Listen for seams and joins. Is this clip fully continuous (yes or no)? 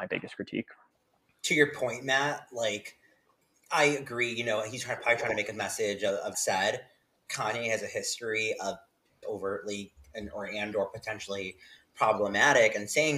no